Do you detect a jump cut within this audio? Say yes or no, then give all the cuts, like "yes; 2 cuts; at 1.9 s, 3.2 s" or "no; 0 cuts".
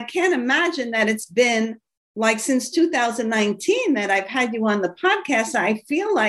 yes; 1 cut; at 1.9 s